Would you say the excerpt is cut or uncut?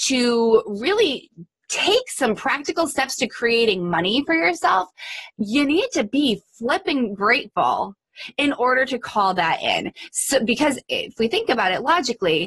uncut